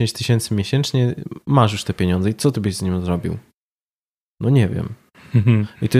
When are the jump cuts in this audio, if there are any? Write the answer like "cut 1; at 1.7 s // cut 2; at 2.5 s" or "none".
none